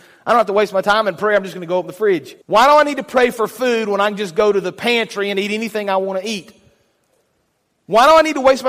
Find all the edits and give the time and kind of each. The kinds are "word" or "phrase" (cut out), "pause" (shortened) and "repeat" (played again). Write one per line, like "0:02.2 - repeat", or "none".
0:02.4 - pause